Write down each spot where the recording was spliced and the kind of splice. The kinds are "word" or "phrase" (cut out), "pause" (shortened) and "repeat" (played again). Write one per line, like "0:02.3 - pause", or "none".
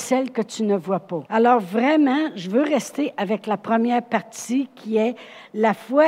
0:01.3 - pause